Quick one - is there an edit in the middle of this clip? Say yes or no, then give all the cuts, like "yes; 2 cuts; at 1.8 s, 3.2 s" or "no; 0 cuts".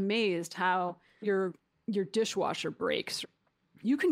yes; 1 cut; at 1.2 s